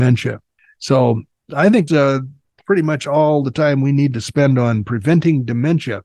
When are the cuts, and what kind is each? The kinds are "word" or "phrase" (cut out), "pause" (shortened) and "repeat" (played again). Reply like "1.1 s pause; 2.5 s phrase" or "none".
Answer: 1.9 s word